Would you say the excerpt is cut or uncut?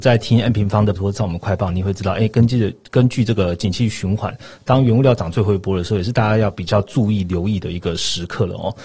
cut